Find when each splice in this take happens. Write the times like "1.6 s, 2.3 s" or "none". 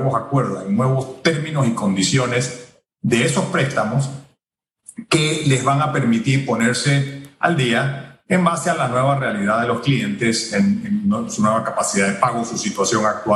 none